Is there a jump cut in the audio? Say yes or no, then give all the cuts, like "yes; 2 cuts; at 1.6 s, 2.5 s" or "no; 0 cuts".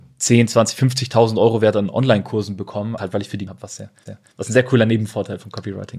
yes; 3 cuts; at 3.0 s, 3.5 s, 4.1 s